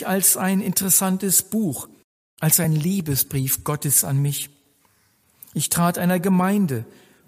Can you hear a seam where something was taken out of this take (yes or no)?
no